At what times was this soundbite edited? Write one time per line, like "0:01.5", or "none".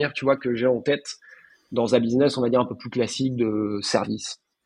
none